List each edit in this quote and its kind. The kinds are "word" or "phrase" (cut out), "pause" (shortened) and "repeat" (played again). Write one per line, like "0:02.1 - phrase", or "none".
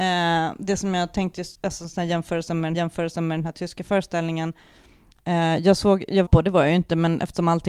0:01.5 - pause
0:02.7 - repeat
0:06.3 - phrase